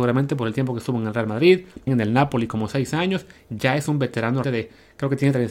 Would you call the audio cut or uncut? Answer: cut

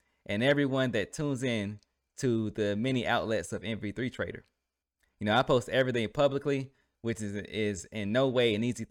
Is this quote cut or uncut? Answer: uncut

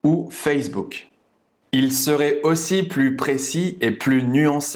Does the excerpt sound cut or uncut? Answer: uncut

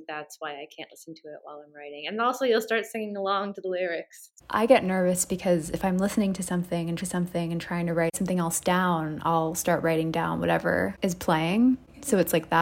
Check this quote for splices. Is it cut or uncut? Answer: cut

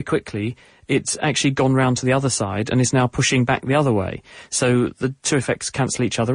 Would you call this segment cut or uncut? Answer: uncut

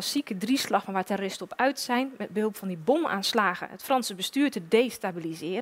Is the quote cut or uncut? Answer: uncut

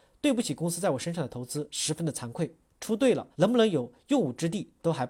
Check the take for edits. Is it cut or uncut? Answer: cut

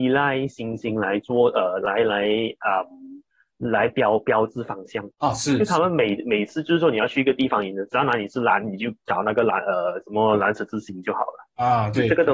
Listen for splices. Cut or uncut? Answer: cut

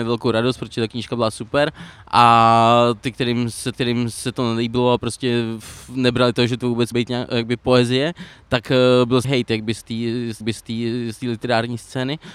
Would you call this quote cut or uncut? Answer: cut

